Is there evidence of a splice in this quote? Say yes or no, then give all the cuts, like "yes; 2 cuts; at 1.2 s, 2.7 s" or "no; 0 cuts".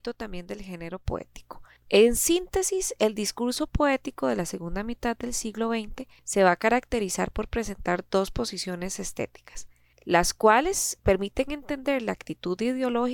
no; 0 cuts